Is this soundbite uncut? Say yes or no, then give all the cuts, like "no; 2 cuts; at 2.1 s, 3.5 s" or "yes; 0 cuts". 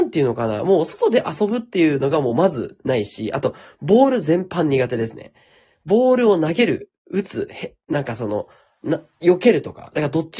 yes; 0 cuts